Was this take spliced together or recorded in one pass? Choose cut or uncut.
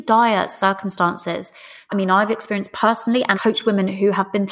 cut